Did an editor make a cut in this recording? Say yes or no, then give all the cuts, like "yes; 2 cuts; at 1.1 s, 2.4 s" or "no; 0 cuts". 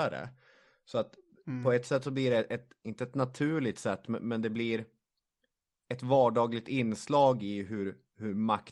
no; 0 cuts